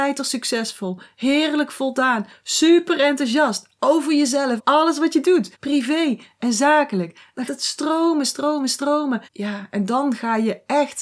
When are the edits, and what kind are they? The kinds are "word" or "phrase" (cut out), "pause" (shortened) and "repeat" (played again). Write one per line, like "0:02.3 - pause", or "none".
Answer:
0:04.6 - phrase
0:05.5 - pause
0:07.5 - word
0:09.2 - pause